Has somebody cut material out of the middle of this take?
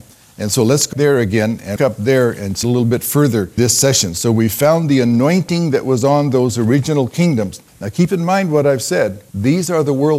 yes; 6 cuts; at 0.9 s, 1.8 s, 2.6 s, 3.6 s, 7.7 s, 9.3 s

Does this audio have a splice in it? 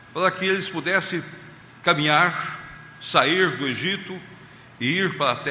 no; 0 cuts

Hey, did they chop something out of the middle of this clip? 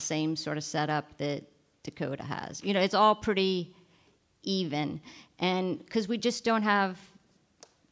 no; 0 cuts

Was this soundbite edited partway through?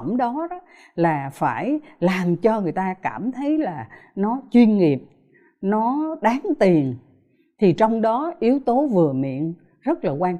no; 0 cuts

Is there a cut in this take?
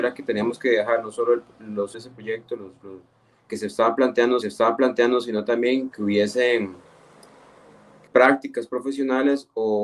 yes; 5 cuts; at 1.9 s, 3.5 s, 4.4 s, 5.9 s, 8.1 s

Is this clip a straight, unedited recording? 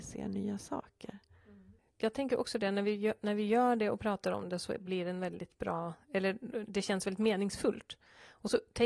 yes; 0 cuts

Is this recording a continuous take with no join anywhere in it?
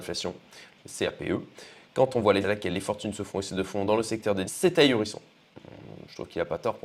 no; 2 cuts; at 2.4 s, 4.4 s

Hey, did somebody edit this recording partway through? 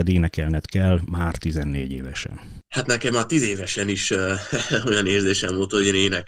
no; 0 cuts

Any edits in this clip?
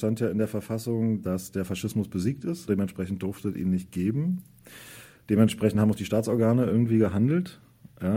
no; 0 cuts

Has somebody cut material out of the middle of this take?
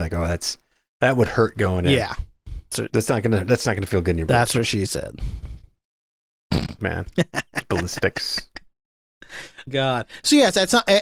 yes; 3 cuts; at 2.7 s, 6.8 s, 9.7 s

